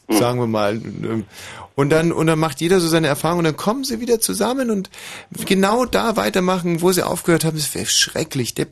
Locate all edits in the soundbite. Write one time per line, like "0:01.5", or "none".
none